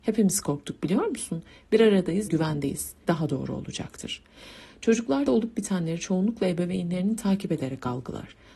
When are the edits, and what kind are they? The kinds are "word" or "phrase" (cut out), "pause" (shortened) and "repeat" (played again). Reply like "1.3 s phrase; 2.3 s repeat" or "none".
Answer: 2.3 s word; 3.0 s word; 5.3 s word; 7.2 s word